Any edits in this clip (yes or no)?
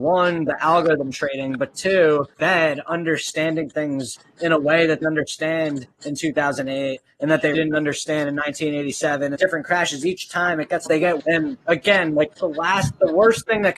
yes